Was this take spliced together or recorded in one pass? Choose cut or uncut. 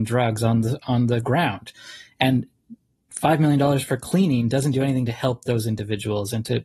uncut